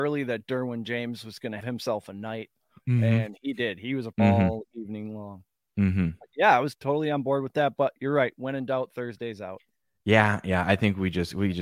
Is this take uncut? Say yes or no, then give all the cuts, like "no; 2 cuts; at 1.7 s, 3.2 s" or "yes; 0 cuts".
no; 3 cuts; at 1.6 s, 4.1 s, 6.7 s